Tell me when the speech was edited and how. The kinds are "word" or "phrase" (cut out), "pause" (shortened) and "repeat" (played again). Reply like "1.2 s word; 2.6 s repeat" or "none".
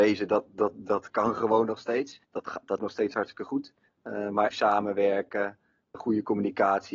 2.2 s pause; 2.8 s word; 3.9 s pause; 4.5 s word; 5.9 s word